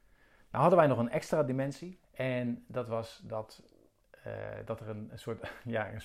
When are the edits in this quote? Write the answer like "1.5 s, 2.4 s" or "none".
2.0 s